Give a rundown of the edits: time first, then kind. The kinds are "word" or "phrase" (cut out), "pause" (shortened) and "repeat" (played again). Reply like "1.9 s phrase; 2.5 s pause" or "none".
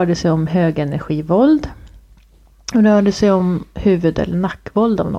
none